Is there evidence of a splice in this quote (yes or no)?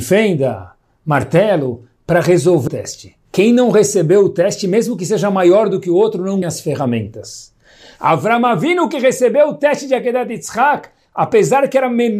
yes